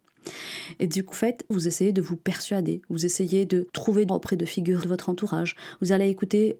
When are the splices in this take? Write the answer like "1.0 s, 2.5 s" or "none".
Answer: 1.1 s, 1.5 s, 3.7 s, 4.1 s, 4.8 s